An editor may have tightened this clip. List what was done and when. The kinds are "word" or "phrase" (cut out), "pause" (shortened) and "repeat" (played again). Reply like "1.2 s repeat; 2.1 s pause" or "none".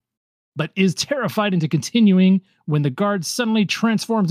none